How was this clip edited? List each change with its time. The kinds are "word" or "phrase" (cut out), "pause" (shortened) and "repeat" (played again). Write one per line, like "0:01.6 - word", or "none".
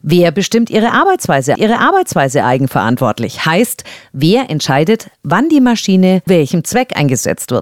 0:01.6 - repeat
0:06.3 - word